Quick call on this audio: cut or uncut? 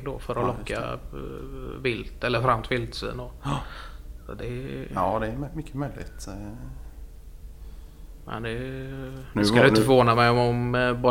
uncut